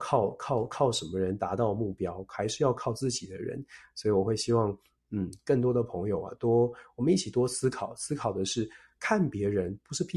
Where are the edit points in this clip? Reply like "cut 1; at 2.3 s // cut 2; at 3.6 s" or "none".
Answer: none